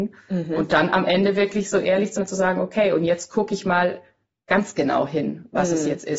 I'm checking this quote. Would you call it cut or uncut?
cut